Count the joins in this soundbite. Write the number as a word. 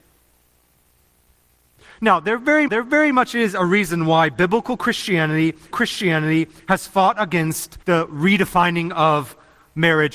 three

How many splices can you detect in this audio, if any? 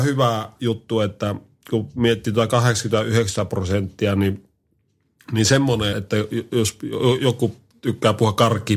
one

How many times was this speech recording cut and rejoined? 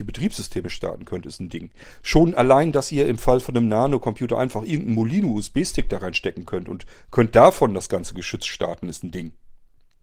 zero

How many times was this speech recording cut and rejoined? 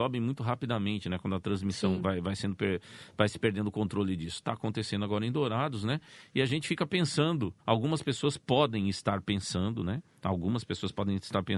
one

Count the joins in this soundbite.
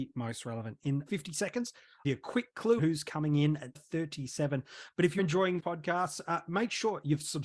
six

